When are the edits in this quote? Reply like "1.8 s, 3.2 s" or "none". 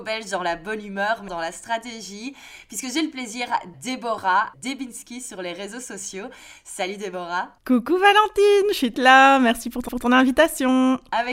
1.3 s, 3.7 s, 4.5 s, 7.6 s, 8.9 s, 9.9 s